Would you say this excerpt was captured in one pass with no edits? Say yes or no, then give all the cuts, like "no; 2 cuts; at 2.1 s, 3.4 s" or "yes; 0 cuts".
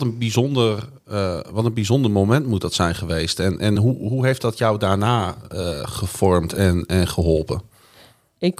yes; 0 cuts